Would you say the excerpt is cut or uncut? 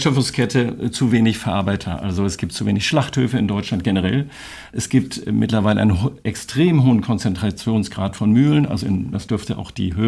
cut